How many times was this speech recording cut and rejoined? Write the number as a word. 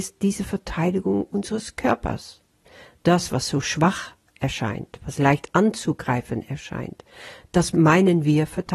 zero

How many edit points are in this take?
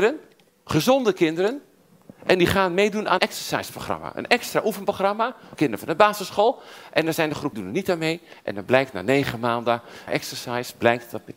four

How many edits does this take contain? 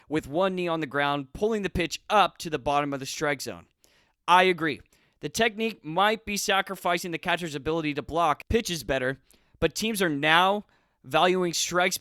zero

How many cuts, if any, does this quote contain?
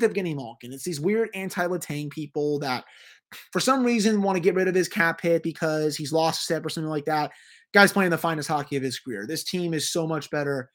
zero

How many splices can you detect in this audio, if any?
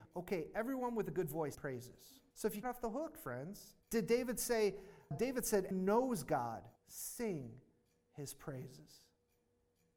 seven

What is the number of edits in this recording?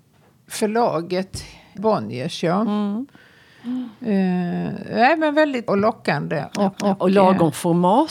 three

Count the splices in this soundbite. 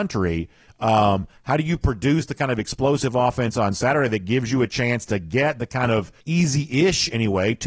one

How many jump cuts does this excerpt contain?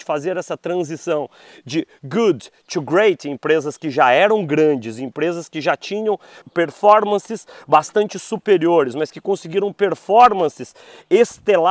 one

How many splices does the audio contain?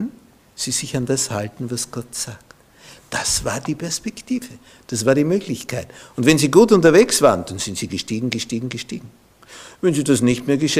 zero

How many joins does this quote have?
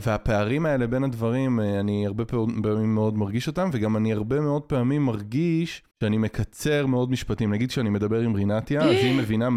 one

